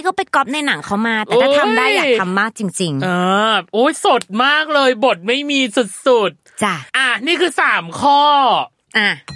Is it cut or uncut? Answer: cut